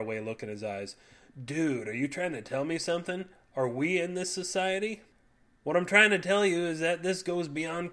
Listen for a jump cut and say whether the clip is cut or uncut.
uncut